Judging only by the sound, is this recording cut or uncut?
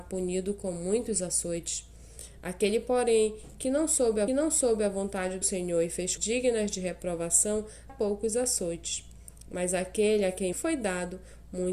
cut